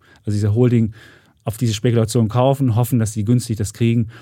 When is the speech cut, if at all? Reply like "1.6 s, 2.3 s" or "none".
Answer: none